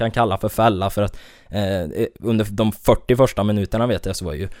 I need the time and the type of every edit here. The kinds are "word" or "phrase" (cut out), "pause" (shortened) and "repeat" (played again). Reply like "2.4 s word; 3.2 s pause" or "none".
none